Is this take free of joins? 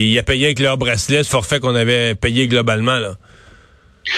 no; 1 cut; at 1.3 s

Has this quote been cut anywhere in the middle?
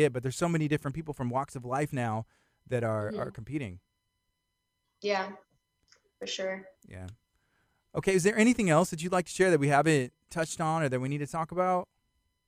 no; 0 cuts

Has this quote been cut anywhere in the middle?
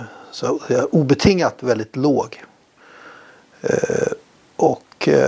no; 0 cuts

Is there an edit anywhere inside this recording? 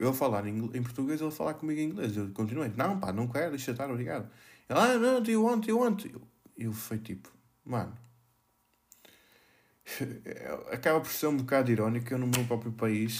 no; 0 cuts

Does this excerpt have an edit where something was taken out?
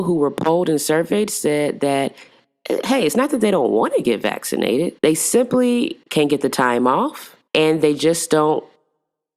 yes; 3 cuts; at 5.0 s, 6.0 s, 7.5 s

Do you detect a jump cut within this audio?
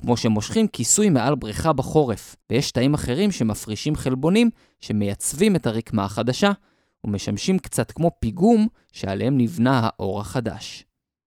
yes; 1 cut; at 2.4 s

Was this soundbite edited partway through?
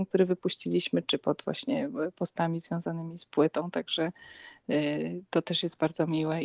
no; 0 cuts

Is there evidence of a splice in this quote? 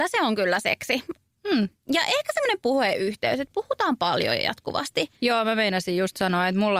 no; 0 cuts

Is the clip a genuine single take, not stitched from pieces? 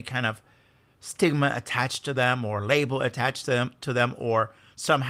yes; 0 cuts

